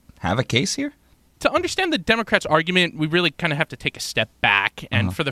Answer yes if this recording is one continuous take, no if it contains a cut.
yes